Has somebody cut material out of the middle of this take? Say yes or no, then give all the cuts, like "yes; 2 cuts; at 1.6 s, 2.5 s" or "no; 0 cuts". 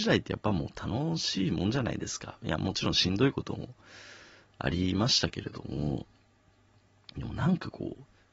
no; 0 cuts